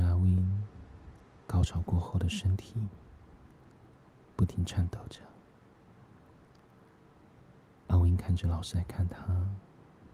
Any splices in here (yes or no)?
no